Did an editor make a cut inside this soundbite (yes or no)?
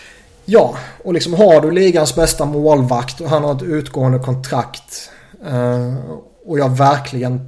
no